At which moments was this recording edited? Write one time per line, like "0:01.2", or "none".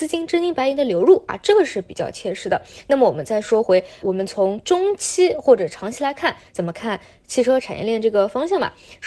0:04.0